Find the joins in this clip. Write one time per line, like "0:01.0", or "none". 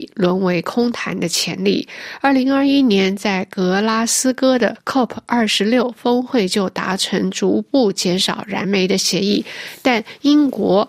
none